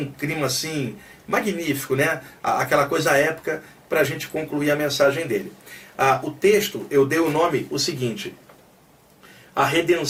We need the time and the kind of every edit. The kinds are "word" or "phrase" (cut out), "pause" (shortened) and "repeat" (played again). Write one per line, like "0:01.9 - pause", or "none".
none